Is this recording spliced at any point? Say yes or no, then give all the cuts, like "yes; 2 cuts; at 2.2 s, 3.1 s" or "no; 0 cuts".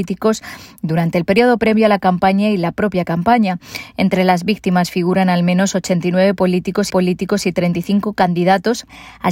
yes; 1 cut; at 6.9 s